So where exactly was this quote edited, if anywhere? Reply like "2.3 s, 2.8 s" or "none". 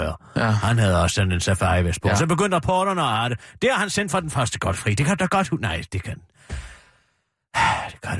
none